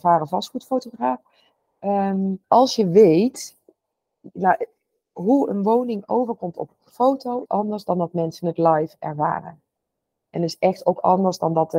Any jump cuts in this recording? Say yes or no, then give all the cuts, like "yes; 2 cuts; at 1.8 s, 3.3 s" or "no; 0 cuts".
yes; 2 cuts; at 2.4 s, 7.5 s